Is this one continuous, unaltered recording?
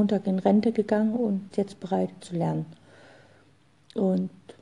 no; 2 cuts; at 1.5 s, 2.2 s

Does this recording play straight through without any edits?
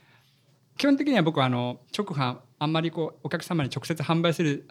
no; 1 cut; at 1.9 s

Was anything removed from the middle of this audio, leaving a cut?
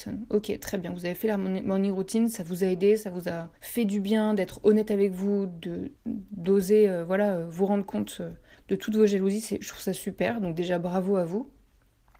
yes; 3 cuts; at 3.6 s, 6.0 s, 8.5 s

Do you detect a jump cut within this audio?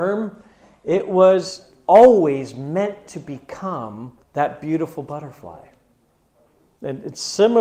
yes; 1 cut; at 4.2 s

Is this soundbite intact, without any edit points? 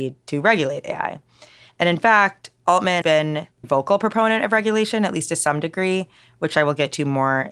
no; 2 cuts; at 3.0 s, 3.6 s

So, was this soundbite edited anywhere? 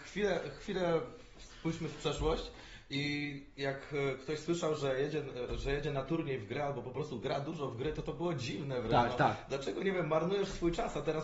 no; 0 cuts

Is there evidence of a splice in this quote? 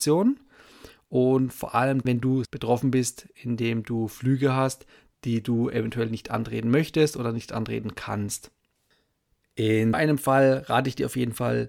yes; 3 cuts; at 2.0 s, 2.4 s, 9.9 s

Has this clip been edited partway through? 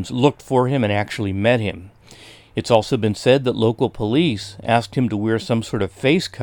no; 0 cuts

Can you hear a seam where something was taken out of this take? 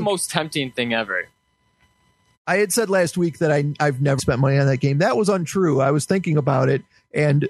yes; 1 cut; at 4.2 s

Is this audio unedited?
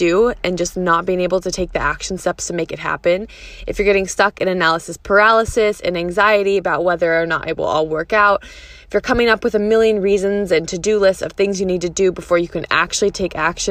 yes; 0 cuts

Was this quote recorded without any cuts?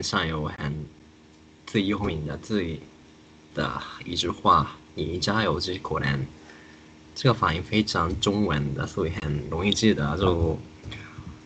no; 1 cut; at 3.5 s

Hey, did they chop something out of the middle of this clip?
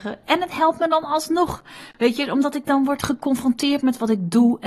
no; 0 cuts

